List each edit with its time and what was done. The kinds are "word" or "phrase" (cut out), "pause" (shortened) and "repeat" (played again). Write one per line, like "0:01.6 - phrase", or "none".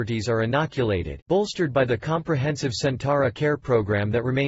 0:01.3 - word
0:03.3 - word